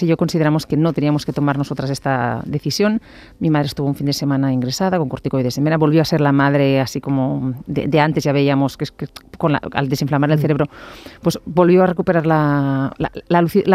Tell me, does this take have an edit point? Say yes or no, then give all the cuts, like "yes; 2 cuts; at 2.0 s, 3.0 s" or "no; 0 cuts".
no; 0 cuts